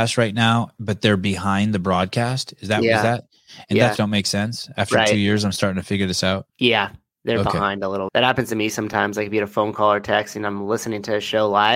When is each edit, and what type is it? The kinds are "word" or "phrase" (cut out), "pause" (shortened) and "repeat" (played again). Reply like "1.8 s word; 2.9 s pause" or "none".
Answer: 4.0 s phrase; 6.5 s pause; 8.1 s word

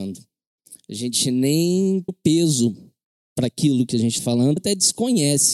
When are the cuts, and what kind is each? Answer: 2.1 s word; 4.2 s word; 4.6 s word

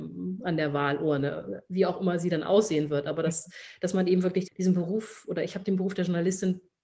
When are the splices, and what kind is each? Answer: 4.5 s word

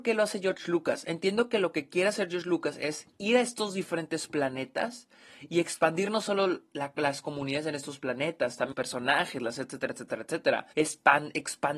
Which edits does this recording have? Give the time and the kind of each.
8.7 s word; 9.6 s word; 10.7 s pause

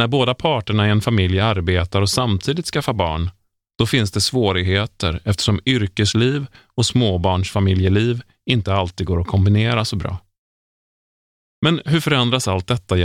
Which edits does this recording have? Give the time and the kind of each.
none

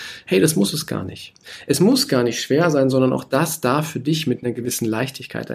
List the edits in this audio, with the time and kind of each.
none

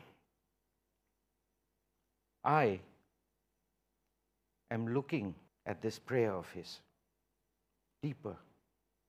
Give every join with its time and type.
5.5 s pause

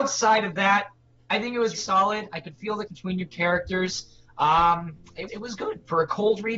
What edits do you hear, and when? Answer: 1.8 s word; 2.9 s word; 5.3 s word

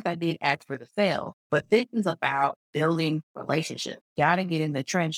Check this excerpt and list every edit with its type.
1.4 s pause; 4.1 s pause

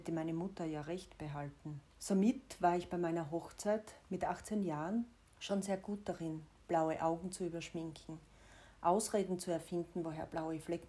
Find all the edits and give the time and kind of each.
1.9 s pause; 5.3 s pause

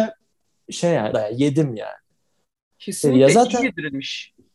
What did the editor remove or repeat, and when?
1.1 s phrase

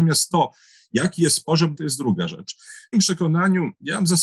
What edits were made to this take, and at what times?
1.8 s word; 2.9 s word

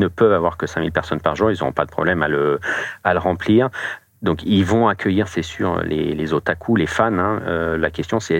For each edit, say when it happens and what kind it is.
none

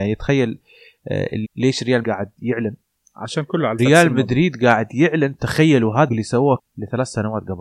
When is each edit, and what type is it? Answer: 1.4 s word; 2.0 s word; 3.8 s word; 6.1 s word; 6.6 s word

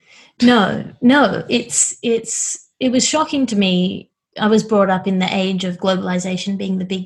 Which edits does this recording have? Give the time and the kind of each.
none

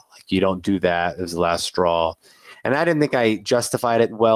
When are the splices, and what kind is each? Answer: none

